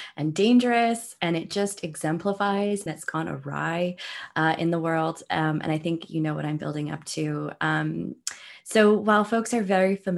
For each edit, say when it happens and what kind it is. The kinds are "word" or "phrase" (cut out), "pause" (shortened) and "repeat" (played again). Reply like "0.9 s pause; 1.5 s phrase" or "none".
2.9 s word